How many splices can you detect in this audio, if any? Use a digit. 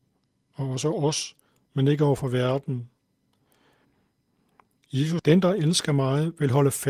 1